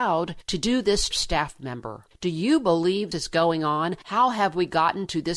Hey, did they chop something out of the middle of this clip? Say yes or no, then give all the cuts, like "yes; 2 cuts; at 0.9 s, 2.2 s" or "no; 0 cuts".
yes; 2 cuts; at 1.1 s, 3.1 s